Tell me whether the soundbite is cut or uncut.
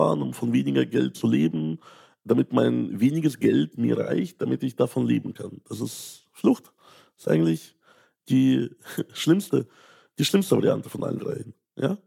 uncut